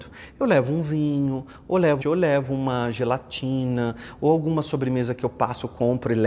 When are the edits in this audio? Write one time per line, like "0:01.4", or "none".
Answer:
0:02.0